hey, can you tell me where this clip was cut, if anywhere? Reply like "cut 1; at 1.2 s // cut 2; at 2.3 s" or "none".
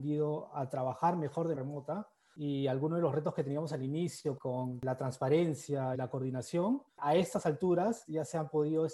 cut 1; at 1.5 s // cut 2; at 4.4 s // cut 3; at 5.9 s // cut 4; at 6.9 s

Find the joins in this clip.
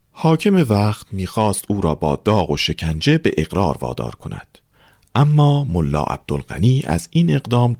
none

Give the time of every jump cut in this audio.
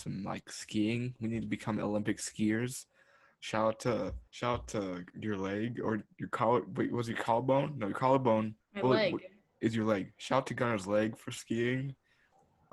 cut 1; at 4.3 s // cut 2; at 5.1 s // cut 3; at 8.6 s

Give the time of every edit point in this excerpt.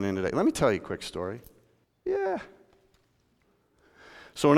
cut 1; at 1.8 s

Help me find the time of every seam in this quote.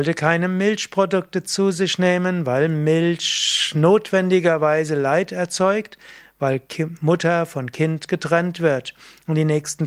none

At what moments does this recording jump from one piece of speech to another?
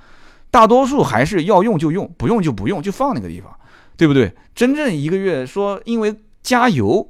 none

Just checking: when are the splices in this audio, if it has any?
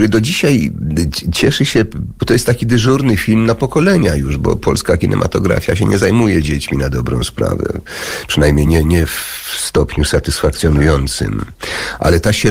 none

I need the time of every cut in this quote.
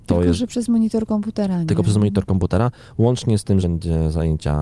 cut 1; at 3.6 s

